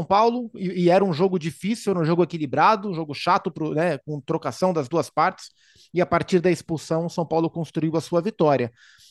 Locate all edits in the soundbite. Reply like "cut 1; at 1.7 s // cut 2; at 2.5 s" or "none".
none